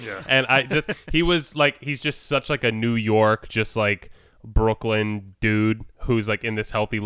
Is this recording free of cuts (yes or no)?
yes